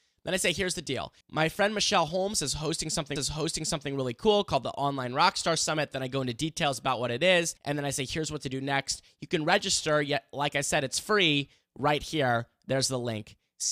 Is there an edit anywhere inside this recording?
yes; 3 cuts; at 1.2 s, 3.2 s, 7.6 s

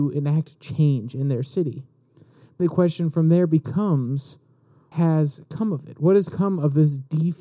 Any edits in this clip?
yes; 2 cuts; at 2.6 s, 4.9 s

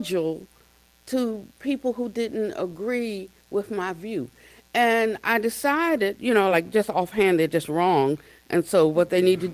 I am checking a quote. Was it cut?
no; 0 cuts

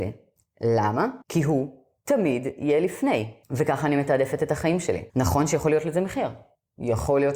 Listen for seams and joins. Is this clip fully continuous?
no; 3 cuts; at 1.2 s, 3.4 s, 5.1 s

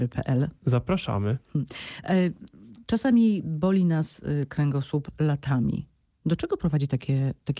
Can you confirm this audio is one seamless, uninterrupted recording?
yes; 0 cuts

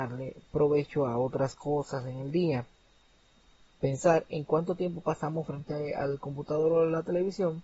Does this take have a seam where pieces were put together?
no; 0 cuts

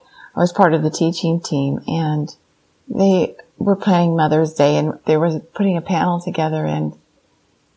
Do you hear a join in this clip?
no; 0 cuts

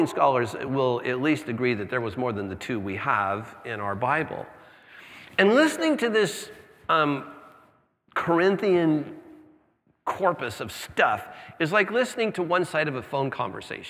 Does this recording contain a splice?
no; 0 cuts

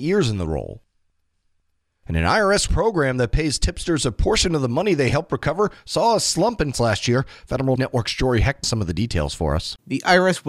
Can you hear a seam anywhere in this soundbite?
yes; 4 cuts; at 2.7 s, 6.7 s, 7.8 s, 8.6 s

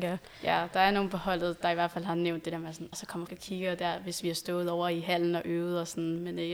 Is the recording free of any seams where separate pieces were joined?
no; 2 cuts; at 2.9 s, 3.3 s

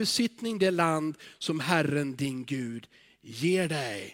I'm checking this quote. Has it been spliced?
no; 0 cuts

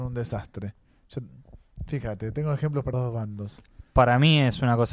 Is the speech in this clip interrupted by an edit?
yes; 1 cut; at 2.9 s

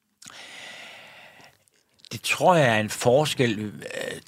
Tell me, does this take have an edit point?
no; 0 cuts

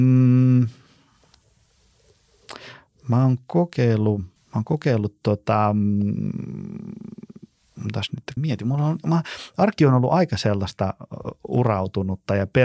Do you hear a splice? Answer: yes; 2 cuts; at 4.4 s, 8.4 s

